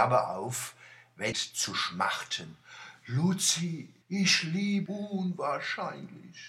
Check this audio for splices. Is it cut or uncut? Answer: cut